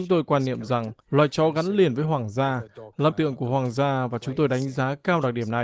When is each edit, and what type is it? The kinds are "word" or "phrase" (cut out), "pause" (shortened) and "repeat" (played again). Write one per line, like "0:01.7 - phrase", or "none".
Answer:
0:01.0 - pause
0:03.1 - word